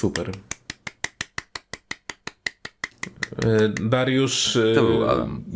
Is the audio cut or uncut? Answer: uncut